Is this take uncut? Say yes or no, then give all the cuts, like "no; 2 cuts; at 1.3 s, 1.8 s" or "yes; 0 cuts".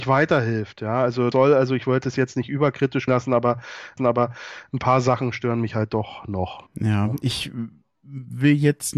no; 4 cuts; at 1.3 s, 3.1 s, 4.0 s, 6.7 s